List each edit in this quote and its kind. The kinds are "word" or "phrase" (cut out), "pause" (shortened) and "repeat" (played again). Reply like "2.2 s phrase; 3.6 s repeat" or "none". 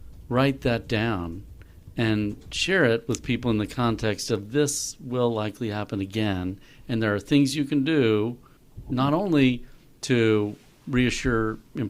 none